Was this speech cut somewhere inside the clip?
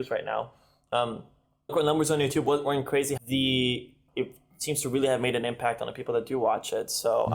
yes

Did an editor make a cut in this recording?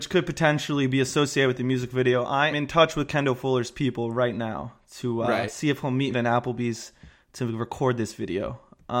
yes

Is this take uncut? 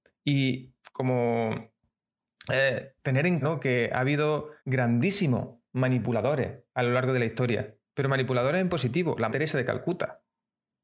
no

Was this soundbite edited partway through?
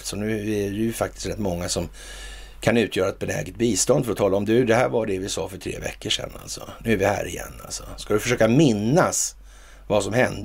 no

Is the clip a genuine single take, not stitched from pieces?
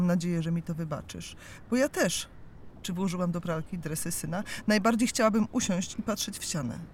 yes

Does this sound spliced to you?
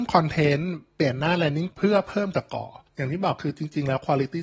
yes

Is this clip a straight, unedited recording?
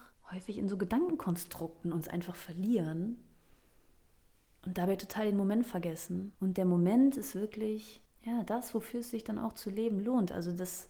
no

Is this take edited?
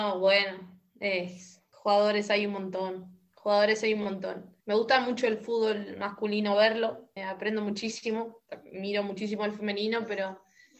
yes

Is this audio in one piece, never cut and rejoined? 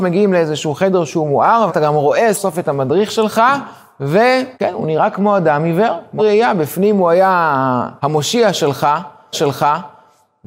no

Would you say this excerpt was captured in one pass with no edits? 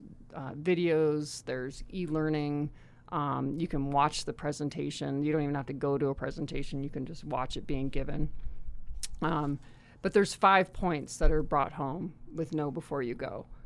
yes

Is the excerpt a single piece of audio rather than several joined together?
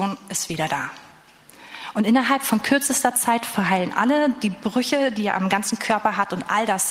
yes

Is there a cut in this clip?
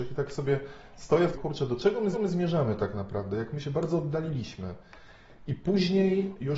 yes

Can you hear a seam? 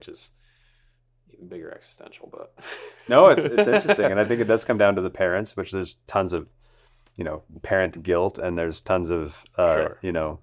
no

